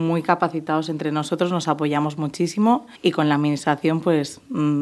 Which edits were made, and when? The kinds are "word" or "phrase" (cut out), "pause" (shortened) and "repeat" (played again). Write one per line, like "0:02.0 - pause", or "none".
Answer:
0:03.0 - pause